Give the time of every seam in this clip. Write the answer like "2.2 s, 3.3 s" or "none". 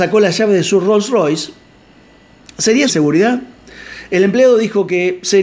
2.9 s

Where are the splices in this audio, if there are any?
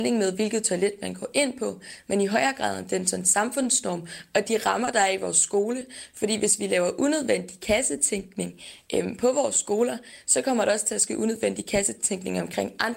none

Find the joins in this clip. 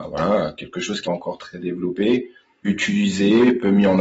1.0 s, 2.7 s

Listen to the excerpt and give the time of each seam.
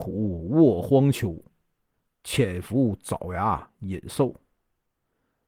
none

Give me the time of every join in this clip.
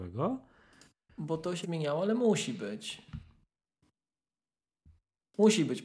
1.6 s

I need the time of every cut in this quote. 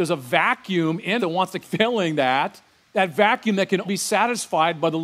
1.2 s, 1.6 s, 2.8 s, 3.8 s

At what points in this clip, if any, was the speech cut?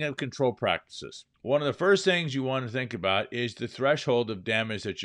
1.3 s

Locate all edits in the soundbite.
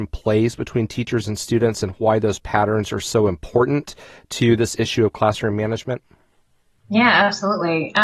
none

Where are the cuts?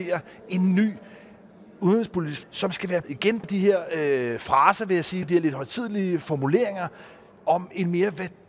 2.4 s, 3.0 s, 3.4 s, 5.2 s

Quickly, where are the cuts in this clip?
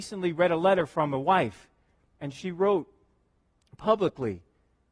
none

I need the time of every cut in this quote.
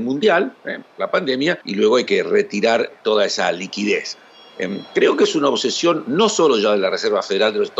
1.6 s

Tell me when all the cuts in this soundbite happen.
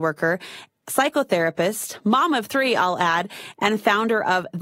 none

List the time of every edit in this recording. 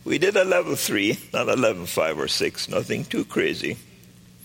none

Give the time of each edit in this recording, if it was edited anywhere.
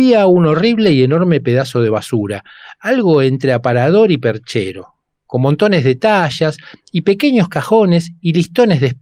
none

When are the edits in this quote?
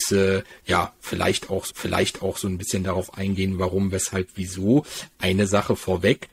1.7 s

